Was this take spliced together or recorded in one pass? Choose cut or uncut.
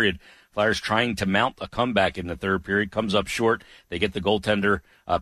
uncut